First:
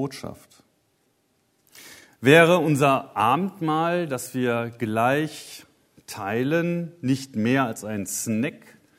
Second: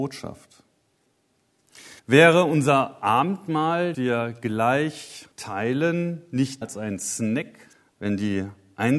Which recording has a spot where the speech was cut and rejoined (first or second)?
second